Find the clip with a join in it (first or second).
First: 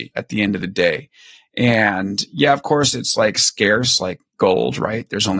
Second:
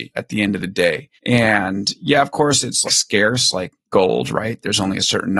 second